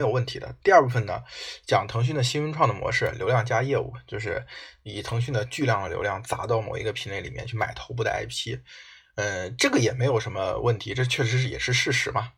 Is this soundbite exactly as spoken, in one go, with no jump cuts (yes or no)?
yes